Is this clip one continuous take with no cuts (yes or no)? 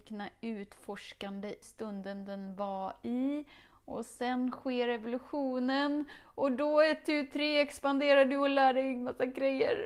no